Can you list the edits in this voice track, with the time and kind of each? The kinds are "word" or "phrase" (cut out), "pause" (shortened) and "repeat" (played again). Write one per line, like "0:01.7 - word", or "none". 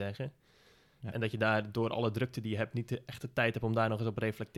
none